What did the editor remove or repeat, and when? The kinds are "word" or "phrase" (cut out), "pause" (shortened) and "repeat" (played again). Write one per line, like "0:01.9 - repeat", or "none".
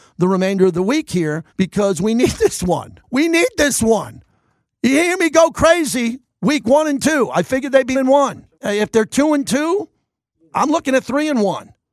0:01.5 - pause
0:03.0 - pause
0:07.9 - word
0:08.5 - pause